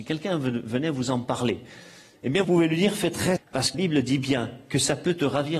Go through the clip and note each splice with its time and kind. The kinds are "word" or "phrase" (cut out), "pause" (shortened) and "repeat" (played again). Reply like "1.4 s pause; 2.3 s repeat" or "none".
2.4 s word; 3.4 s word; 3.7 s word